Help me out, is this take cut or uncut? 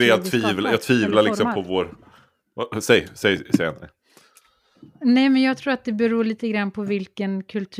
uncut